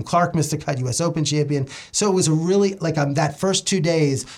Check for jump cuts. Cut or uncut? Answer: uncut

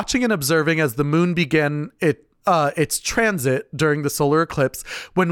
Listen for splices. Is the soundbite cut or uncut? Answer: cut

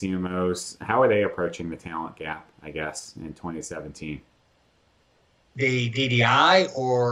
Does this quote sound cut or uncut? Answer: uncut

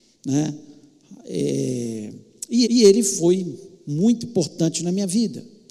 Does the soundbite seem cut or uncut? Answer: cut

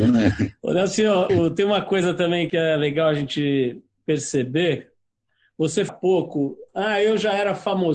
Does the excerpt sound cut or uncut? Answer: cut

